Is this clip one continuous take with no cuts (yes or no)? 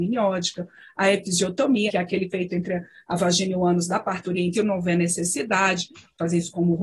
no